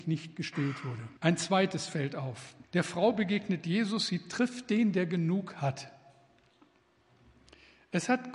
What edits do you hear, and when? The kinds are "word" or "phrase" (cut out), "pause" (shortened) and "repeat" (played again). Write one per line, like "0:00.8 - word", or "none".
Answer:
0:01.2 - pause
0:02.6 - pause